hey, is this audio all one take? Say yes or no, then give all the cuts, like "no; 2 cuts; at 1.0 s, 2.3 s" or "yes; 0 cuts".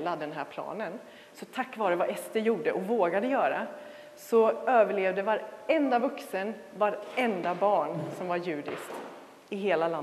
yes; 0 cuts